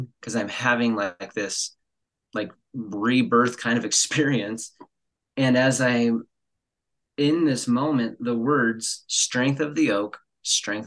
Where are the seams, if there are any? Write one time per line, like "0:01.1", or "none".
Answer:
none